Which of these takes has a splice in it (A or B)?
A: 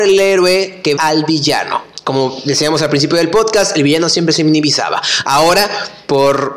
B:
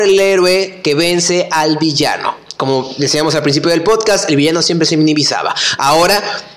A